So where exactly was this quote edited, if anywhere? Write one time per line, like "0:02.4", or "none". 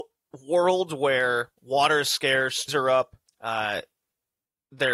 0:01.6
0:02.7
0:03.3